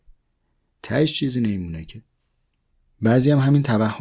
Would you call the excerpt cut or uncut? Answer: uncut